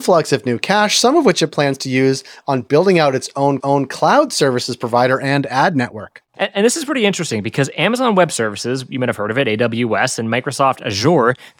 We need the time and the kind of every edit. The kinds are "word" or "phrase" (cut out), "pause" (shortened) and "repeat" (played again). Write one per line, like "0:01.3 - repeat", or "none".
0:03.6 - repeat
0:06.3 - pause